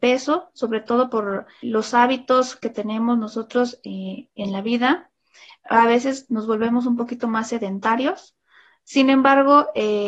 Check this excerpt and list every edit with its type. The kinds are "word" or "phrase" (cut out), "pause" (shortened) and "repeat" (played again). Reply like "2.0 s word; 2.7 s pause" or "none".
1.6 s word